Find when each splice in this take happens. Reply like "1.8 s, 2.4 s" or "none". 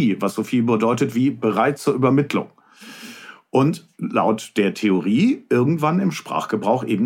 3.9 s